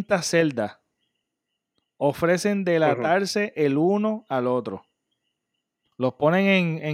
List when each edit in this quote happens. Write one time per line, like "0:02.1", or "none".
none